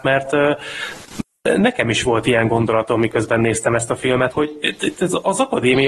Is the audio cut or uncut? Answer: cut